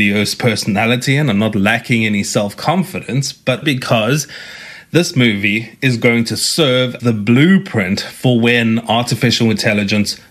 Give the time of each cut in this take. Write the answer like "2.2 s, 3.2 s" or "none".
3.6 s, 7.0 s